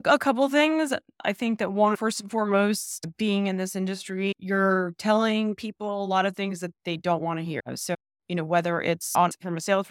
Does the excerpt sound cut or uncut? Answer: uncut